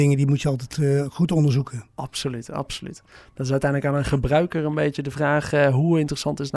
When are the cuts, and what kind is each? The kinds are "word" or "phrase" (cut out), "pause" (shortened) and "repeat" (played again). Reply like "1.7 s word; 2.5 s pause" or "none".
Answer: none